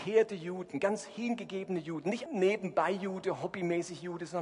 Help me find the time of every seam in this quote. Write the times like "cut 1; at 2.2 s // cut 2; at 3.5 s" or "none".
cut 1; at 2.3 s